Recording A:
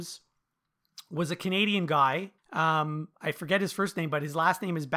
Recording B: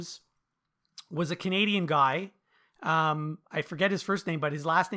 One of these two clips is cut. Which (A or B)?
A